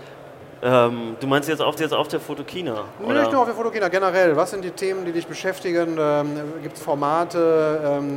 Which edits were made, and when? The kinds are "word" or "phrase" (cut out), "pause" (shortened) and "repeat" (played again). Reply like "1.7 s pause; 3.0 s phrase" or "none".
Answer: 1.8 s repeat; 6.8 s word

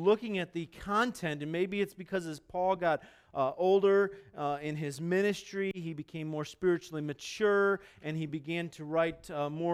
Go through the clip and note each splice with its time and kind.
none

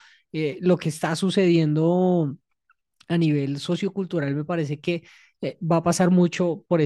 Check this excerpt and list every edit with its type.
none

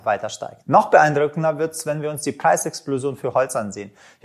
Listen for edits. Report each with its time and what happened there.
none

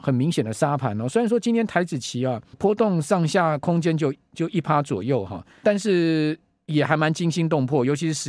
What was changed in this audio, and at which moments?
2.5 s word; 5.6 s word

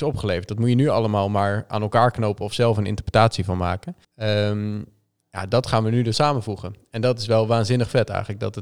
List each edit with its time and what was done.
4.0 s pause; 6.1 s word

